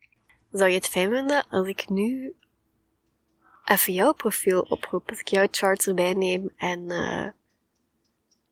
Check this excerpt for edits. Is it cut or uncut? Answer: uncut